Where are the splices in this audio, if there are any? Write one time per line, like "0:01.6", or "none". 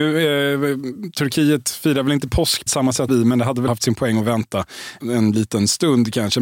0:02.7
0:03.1
0:03.7
0:05.0